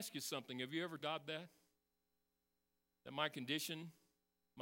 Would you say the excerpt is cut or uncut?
cut